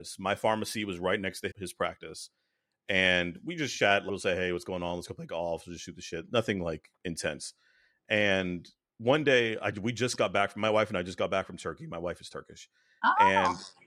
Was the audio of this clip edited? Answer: yes; 1 cut; at 7.0 s

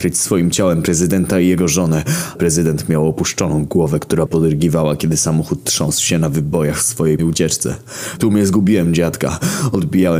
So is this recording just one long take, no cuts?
no; 4 cuts; at 2.4 s, 4.3 s, 7.2 s, 8.2 s

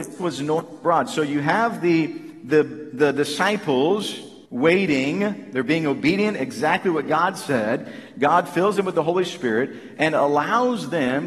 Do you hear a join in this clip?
yes; 1 cut; at 4.5 s

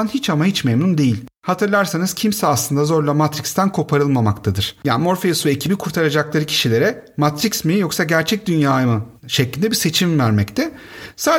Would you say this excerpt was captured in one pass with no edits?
no; 2 cuts; at 1.4 s, 9.2 s

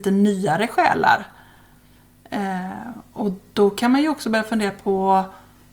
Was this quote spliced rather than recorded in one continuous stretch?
no; 0 cuts

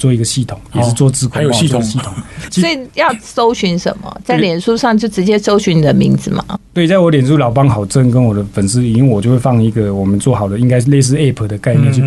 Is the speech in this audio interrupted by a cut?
no; 0 cuts

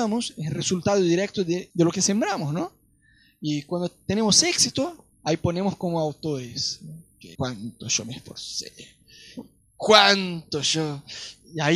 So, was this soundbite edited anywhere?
yes; 2 cuts; at 5.1 s, 7.3 s

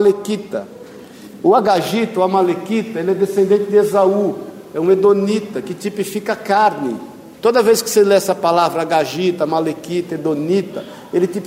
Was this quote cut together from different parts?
yes; 1 cut; at 7.3 s

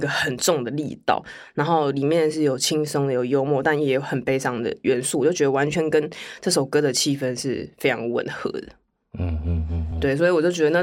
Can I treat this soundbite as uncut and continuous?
yes; 0 cuts

